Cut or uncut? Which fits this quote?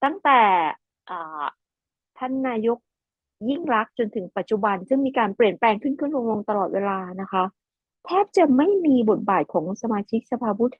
uncut